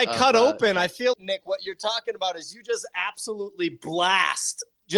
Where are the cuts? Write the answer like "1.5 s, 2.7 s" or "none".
1.1 s